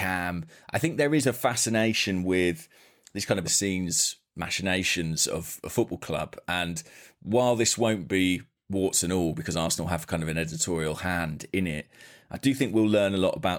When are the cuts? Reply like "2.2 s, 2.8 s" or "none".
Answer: 3.4 s